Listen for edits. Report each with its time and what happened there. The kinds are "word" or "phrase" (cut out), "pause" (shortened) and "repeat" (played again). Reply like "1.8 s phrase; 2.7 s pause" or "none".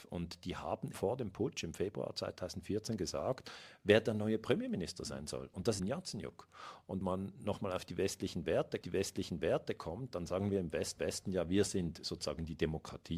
0.9 s word; 5.8 s phrase; 7.0 s word; 8.8 s repeat; 11.0 s repeat